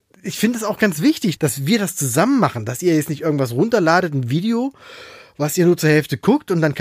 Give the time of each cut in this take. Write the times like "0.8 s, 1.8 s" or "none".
1.4 s